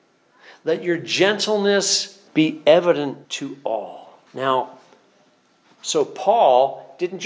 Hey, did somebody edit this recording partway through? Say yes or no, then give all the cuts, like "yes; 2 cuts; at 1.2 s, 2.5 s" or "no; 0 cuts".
yes; 3 cuts; at 2.3 s, 3.2 s, 4.3 s